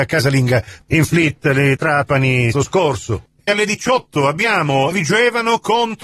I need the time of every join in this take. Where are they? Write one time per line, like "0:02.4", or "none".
0:01.8
0:02.5
0:03.5
0:04.9